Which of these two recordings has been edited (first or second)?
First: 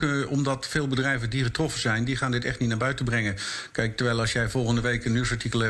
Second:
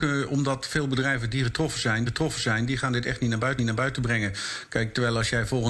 second